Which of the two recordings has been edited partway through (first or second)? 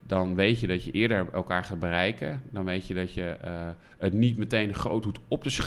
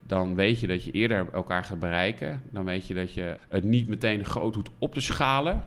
second